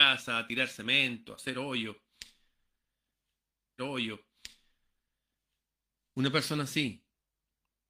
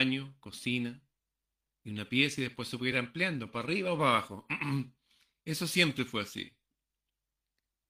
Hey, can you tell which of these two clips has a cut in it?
first; 1 cut; at 3.8 s

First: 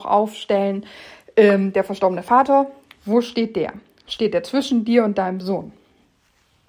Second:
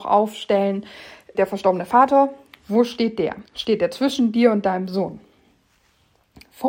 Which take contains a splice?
second; 2 cuts; at 1.3 s, 3.5 s

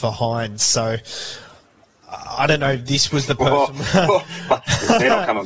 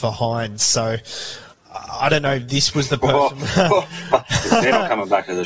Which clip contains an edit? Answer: second; 1 cut; at 1.5 s

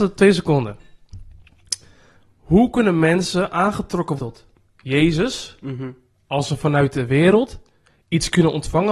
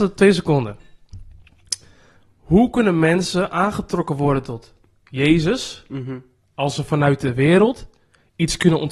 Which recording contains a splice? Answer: first; 1 cut; at 4.2 s

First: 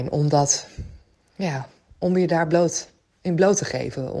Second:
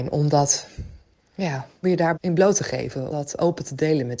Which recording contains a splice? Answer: second; 3 cuts; at 1.8 s, 2.1 s, 3.1 s

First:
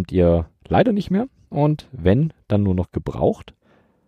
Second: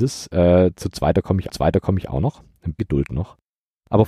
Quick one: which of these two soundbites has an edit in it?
second; 2 cuts; at 1.5 s, 2.8 s

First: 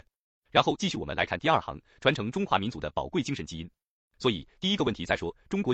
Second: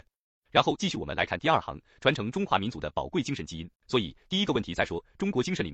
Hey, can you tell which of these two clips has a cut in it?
second; 1 cut; at 3.8 s

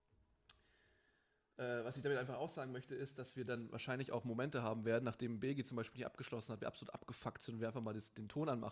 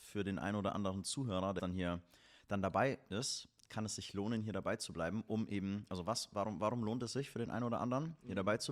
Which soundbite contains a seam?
second; 1 cut; at 1.6 s

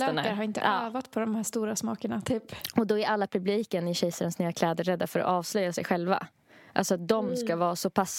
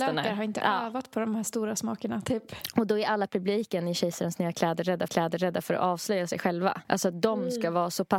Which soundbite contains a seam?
second; 2 cuts; at 5.1 s, 6.8 s

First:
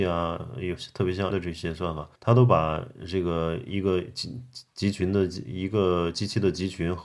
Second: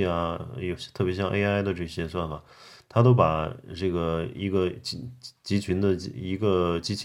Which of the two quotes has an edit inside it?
first; 2 cuts; at 1.3 s, 2.1 s

